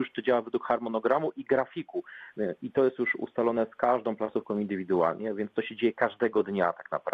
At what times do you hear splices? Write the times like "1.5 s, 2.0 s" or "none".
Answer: none